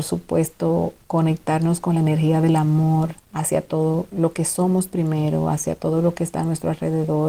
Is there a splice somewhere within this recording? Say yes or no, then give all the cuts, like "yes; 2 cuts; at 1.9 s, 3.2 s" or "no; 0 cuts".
yes; 2 cuts; at 1.0 s, 3.2 s